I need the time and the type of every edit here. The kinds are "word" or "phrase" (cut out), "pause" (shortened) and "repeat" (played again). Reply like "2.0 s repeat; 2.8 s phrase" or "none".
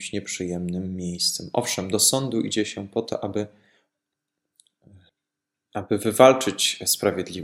none

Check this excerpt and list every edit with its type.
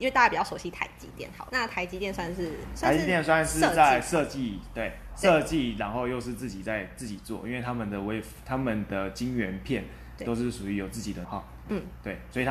1.5 s word; 11.2 s word

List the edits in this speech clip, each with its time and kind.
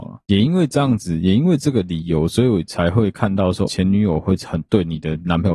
3.7 s word

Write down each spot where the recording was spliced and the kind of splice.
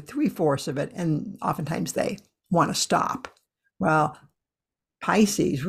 none

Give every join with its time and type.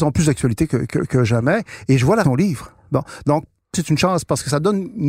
0.9 s word; 2.2 s word; 3.7 s word

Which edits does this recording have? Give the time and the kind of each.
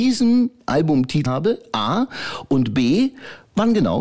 1.3 s word

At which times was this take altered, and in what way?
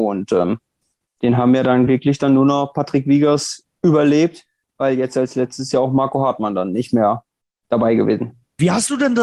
none

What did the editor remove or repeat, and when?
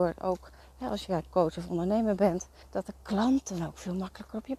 2.6 s pause

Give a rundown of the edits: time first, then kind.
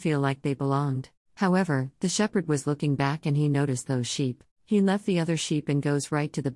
1.2 s pause; 4.5 s pause

